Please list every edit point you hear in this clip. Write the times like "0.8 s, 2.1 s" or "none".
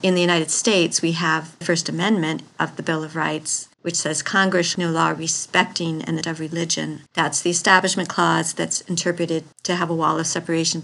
1.6 s, 3.7 s, 4.7 s, 6.2 s, 7.1 s, 9.5 s